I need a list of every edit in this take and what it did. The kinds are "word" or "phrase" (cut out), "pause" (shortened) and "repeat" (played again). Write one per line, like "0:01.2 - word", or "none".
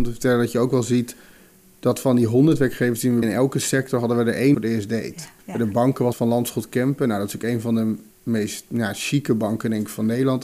0:03.2 - word
0:04.5 - phrase
0:05.4 - pause
0:06.1 - word
0:08.1 - pause